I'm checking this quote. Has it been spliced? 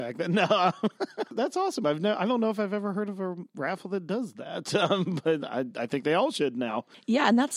no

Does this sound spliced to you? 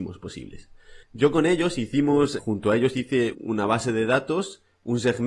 yes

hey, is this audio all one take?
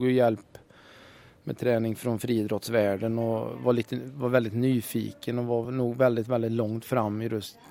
yes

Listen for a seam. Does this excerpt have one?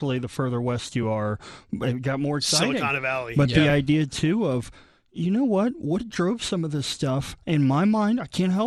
no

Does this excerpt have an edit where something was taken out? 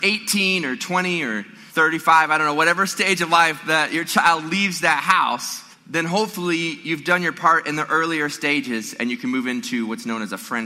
yes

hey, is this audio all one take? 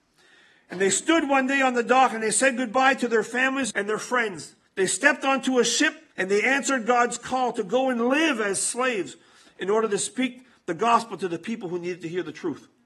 no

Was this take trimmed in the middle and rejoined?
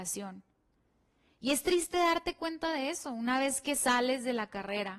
no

